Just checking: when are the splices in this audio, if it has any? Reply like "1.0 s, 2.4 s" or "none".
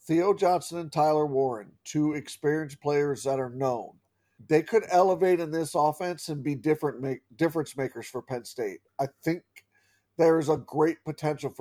none